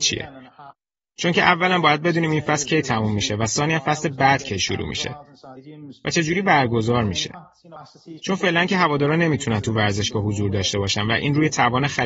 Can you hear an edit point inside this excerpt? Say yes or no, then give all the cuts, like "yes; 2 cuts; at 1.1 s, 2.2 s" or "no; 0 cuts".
no; 0 cuts